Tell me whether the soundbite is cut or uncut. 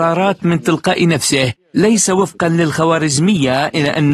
uncut